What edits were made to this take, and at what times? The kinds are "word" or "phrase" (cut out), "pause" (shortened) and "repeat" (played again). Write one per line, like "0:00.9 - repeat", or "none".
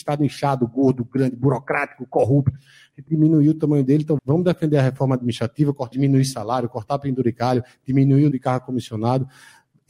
0:03.1 - word
0:04.2 - word
0:05.9 - word
0:08.3 - word

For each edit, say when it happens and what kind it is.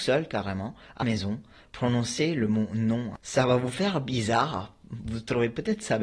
0:01.0 - word

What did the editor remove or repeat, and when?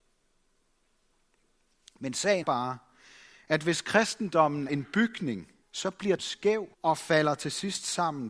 0:02.4 - word
0:04.7 - word
0:05.6 - pause
0:06.2 - word
0:06.7 - pause

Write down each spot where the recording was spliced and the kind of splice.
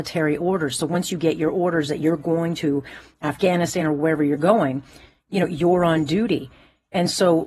none

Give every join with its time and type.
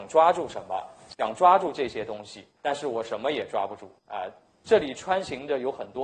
0:02.6 - pause
0:04.0 - pause

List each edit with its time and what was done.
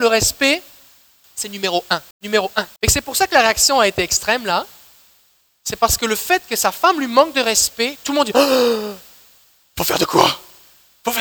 0:02.1 - pause
0:02.8 - pause

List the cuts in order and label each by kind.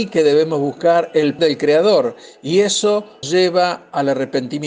0:01.4 - word
0:03.2 - word

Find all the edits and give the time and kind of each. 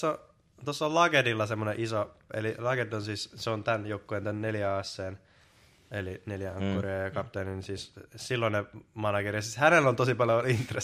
none

